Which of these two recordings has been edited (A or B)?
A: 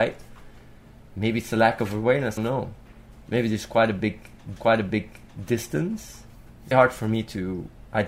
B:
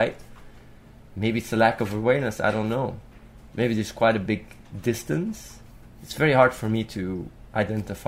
A